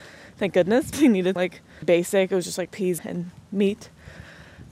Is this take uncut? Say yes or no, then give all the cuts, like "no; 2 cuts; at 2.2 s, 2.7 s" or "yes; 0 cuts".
no; 5 cuts; at 0.9 s, 1.4 s, 1.8 s, 2.7 s, 3.0 s